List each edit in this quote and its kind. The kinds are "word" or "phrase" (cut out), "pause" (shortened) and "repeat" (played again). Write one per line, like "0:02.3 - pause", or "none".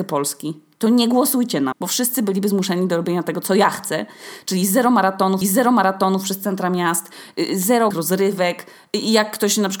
0:01.7 - word
0:05.4 - repeat
0:07.9 - word